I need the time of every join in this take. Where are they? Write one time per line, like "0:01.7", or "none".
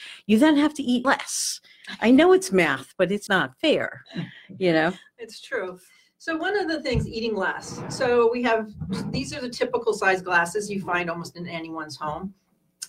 0:01.0
0:03.3